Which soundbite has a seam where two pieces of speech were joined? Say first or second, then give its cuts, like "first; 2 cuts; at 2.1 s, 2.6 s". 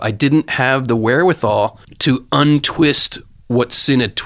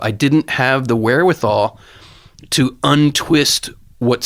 first; 1 cut; at 1.8 s